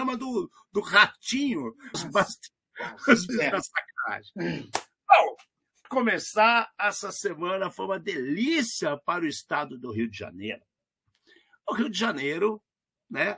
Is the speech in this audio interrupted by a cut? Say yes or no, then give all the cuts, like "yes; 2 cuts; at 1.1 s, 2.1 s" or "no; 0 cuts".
yes; 3 cuts; at 1.9 s, 3.3 s, 5.8 s